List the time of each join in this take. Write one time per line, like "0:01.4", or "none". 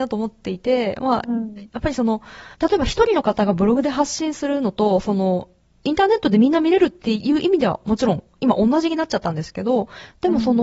0:02.5